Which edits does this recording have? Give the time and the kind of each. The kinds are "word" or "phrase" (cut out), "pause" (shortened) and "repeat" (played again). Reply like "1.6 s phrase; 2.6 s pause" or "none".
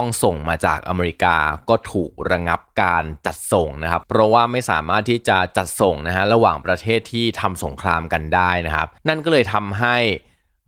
9.0 s pause